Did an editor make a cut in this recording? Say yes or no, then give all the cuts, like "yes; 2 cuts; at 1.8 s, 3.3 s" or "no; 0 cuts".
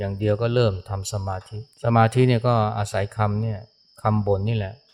yes; 1 cut; at 1.7 s